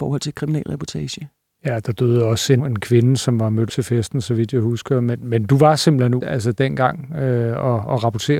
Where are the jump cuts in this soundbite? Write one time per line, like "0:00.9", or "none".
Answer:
0:02.6
0:03.7
0:06.2